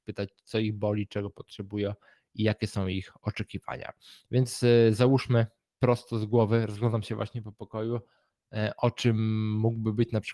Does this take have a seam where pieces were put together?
no; 0 cuts

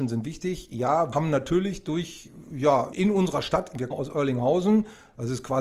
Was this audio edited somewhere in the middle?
yes; 3 cuts; at 1.1 s, 2.9 s, 3.9 s

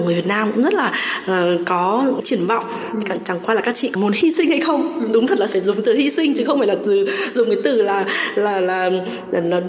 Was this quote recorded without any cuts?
yes; 0 cuts

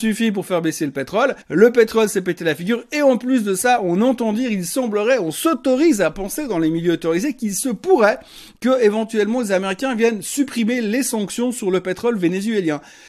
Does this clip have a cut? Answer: yes; 1 cut; at 1.4 s

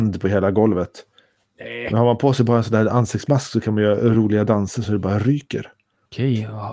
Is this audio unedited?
yes; 0 cuts

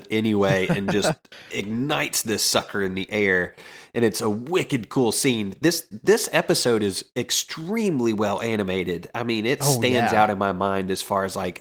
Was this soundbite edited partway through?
no; 0 cuts

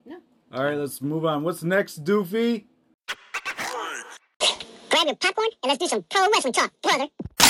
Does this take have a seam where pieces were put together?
no; 0 cuts

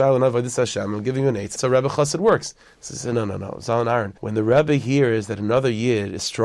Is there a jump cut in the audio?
yes; 4 cuts; at 1.6 s, 2.7 s, 3.1 s, 4.2 s

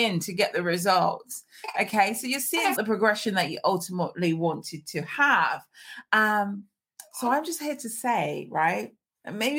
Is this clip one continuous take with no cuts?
no; 1 cut; at 2.8 s

